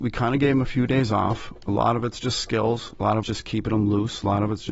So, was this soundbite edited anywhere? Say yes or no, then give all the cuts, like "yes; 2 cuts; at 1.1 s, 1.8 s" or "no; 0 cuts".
yes; 1 cut; at 3.2 s